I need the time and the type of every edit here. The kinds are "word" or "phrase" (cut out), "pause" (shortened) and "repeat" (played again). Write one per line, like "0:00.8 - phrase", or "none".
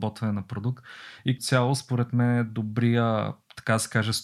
0:01.4 - word